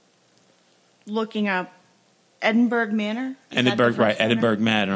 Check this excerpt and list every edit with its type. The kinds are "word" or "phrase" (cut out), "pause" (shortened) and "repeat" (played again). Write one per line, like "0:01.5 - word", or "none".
none